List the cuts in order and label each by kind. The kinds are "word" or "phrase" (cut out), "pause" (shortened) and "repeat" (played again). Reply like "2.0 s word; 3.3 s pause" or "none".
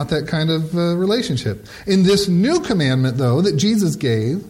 none